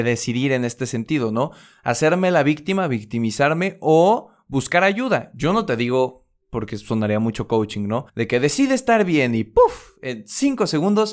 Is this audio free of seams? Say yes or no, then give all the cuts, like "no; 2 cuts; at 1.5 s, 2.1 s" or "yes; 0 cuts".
no; 1 cut; at 8.1 s